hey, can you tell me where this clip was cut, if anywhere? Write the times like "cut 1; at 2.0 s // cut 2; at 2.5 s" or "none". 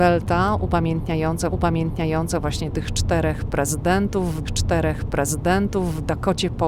cut 1; at 1.5 s // cut 2; at 4.4 s